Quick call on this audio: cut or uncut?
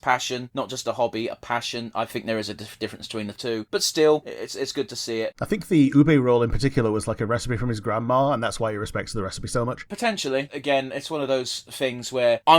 uncut